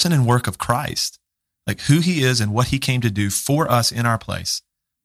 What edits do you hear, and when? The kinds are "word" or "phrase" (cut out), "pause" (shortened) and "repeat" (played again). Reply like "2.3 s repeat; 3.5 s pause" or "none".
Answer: none